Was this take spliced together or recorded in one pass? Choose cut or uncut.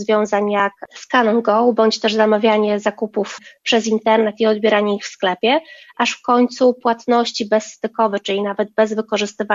uncut